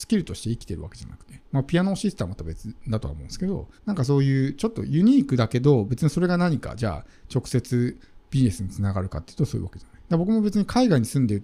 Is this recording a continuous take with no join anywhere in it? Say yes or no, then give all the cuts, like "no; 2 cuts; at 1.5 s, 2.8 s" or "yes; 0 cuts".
no; 1 cut; at 3.8 s